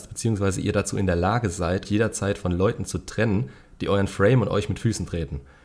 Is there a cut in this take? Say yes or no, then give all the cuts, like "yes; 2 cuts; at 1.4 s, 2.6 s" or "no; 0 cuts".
yes; 1 cut; at 1.8 s